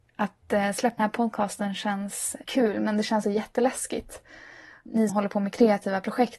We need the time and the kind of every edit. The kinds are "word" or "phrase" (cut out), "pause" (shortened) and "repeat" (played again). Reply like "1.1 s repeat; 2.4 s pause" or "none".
1.0 s word; 2.4 s word; 3.2 s word; 5.1 s word